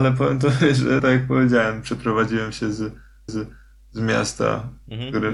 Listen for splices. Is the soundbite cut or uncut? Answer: cut